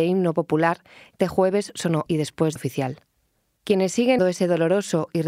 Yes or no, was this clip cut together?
yes